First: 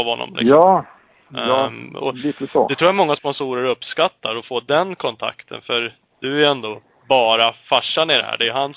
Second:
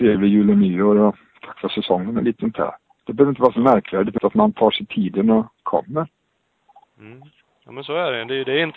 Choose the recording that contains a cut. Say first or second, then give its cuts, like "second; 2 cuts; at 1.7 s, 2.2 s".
second; 1 cut; at 4.2 s